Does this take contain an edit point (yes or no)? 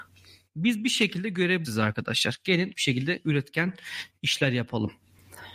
yes